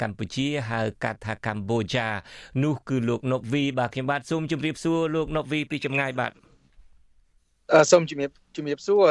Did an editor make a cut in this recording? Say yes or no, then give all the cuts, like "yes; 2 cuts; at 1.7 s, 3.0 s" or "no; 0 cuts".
yes; 1 cut; at 7.4 s